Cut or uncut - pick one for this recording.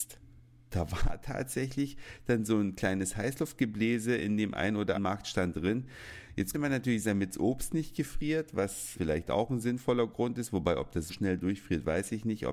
cut